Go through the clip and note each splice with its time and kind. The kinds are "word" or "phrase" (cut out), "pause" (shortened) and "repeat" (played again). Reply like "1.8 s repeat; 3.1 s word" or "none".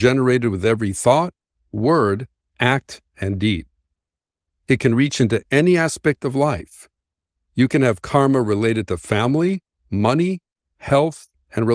none